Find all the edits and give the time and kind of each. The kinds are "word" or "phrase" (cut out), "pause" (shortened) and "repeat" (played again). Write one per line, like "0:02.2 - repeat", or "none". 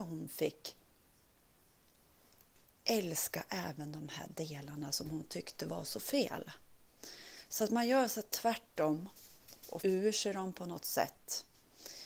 0:09.8 - word